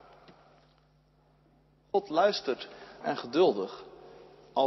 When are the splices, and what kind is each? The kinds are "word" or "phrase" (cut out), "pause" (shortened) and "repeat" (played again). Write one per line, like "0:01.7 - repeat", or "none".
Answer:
0:03.0 - word